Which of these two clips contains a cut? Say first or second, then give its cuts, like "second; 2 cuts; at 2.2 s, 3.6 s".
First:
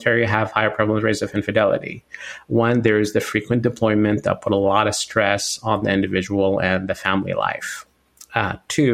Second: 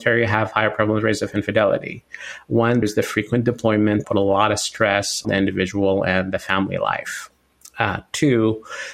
second; 3 cuts; at 2.8 s, 4.0 s, 5.2 s